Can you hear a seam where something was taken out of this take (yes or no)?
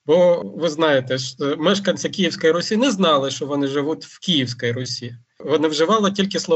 no